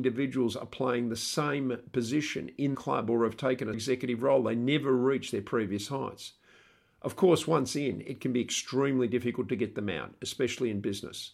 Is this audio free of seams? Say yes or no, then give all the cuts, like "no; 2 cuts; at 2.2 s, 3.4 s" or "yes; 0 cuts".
no; 2 cuts; at 2.7 s, 3.7 s